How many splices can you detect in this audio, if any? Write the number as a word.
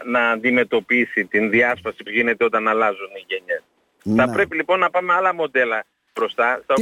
one